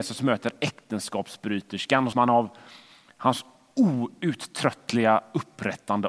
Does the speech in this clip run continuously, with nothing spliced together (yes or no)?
no